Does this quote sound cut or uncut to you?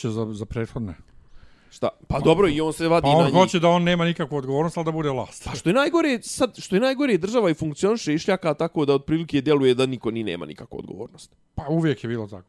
uncut